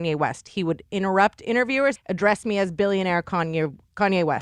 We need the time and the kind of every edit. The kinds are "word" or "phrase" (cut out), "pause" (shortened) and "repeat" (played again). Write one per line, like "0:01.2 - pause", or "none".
0:02.0 - phrase